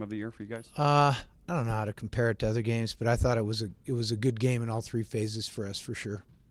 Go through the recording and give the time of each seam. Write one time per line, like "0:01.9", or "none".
none